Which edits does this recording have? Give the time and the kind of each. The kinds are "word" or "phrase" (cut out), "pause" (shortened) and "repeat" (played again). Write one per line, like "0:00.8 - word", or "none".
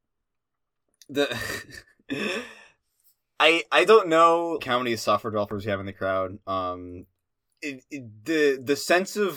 0:04.6 - word